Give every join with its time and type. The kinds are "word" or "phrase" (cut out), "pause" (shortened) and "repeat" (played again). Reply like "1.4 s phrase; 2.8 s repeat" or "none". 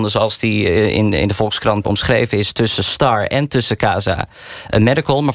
1.8 s word